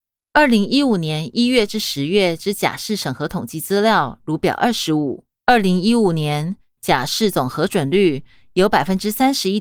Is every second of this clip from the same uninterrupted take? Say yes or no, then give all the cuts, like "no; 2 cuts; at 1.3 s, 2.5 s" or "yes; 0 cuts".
no; 1 cut; at 5.3 s